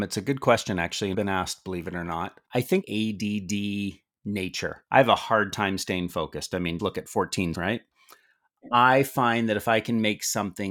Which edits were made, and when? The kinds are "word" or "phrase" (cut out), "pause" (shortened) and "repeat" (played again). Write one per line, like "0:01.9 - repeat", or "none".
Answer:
0:01.1 - phrase
0:02.4 - pause
0:02.8 - phrase
0:04.9 - pause
0:06.8 - word
0:07.5 - word